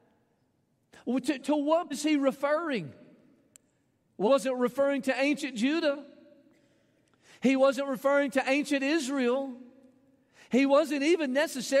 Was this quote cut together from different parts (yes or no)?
yes